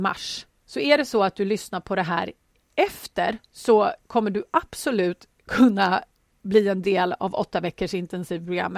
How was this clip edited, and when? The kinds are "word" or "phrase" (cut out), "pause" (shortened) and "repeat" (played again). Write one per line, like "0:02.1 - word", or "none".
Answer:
none

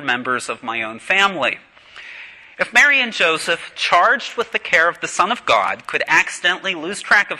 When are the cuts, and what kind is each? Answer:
none

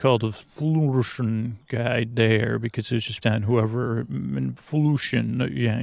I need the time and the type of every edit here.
0:03.2 - word

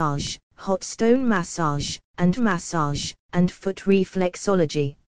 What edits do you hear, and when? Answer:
0:02.4 - repeat

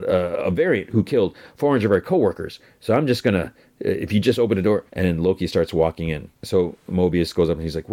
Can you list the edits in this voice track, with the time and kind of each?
0:04.9 - pause
0:06.3 - pause

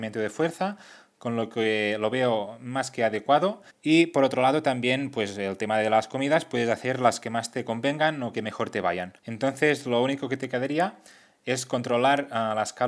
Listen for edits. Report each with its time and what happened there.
0:03.7 - pause
0:09.2 - pause

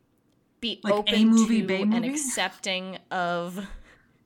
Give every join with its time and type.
none

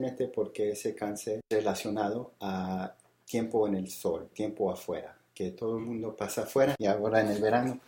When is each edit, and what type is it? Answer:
0:04.3 - word

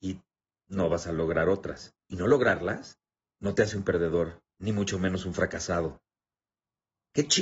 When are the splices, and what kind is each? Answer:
0:02.0 - pause
0:03.2 - pause
0:04.5 - pause

